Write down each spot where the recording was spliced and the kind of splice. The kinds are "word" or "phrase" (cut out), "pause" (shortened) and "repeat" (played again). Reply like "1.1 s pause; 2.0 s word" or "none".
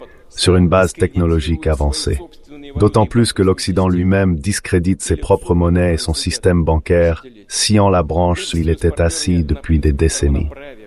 8.5 s word